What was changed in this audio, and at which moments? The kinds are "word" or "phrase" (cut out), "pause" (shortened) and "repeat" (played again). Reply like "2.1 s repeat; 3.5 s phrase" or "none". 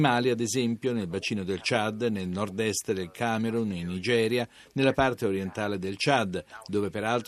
none